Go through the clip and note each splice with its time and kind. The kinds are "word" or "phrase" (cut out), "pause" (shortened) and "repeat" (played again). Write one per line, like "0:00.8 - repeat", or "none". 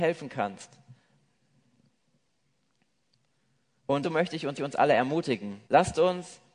0:04.0 - word
0:04.6 - repeat
0:05.6 - pause